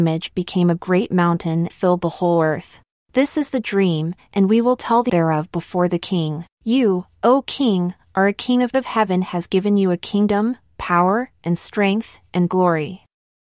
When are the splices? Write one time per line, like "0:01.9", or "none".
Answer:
0:01.7
0:02.9
0:05.1
0:06.5
0:08.7